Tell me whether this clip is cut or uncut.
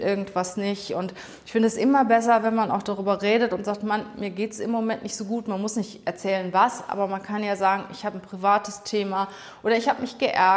uncut